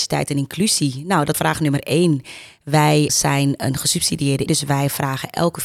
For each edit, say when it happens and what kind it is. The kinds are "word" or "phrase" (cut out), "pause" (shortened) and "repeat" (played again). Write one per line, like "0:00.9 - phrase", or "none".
0:01.3 - word
0:03.1 - word
0:04.5 - word